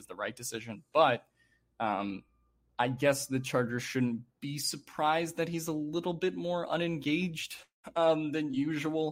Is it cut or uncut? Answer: uncut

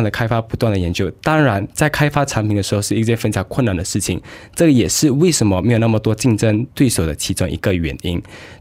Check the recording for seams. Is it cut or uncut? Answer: cut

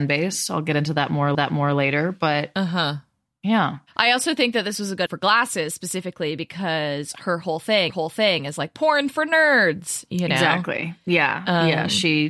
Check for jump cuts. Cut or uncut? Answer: cut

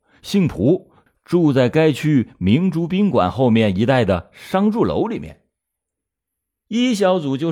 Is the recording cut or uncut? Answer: uncut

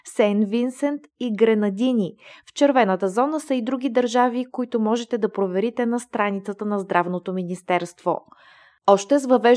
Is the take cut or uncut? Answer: uncut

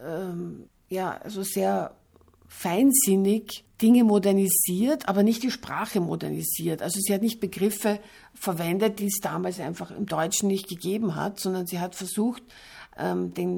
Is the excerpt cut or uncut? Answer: uncut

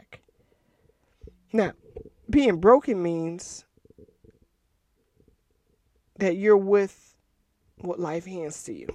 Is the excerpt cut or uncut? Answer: uncut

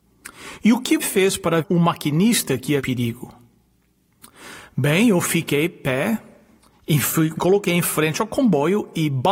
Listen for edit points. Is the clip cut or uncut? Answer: cut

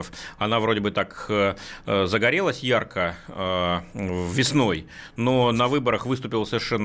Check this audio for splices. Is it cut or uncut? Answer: uncut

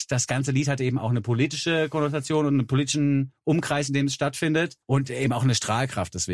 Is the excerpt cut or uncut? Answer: cut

